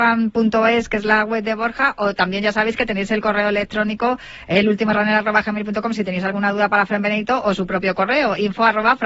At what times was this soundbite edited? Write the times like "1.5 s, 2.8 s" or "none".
none